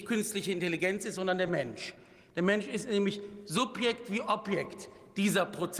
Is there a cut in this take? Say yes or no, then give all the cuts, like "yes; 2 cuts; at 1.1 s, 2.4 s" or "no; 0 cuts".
no; 0 cuts